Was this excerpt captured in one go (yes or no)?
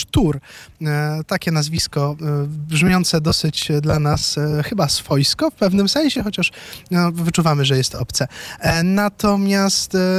yes